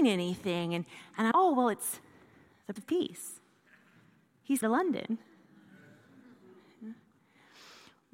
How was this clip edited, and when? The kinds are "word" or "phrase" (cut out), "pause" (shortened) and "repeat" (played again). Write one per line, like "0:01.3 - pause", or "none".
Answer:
0:01.3 - word
0:02.8 - word
0:04.6 - word